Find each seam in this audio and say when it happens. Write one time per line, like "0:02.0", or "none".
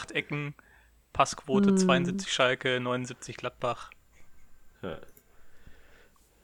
0:04.7